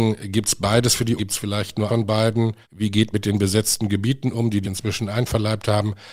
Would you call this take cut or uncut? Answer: cut